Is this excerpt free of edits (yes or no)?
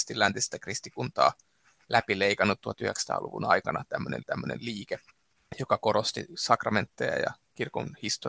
no